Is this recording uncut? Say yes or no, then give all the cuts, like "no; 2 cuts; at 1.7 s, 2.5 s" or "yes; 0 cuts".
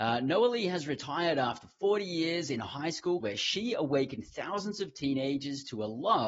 no; 1 cut; at 3.2 s